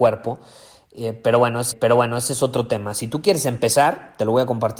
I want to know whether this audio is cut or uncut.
cut